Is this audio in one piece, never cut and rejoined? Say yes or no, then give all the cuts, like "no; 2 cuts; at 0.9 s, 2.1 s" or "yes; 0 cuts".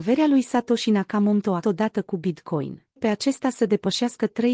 no; 2 cuts; at 1.6 s, 3.0 s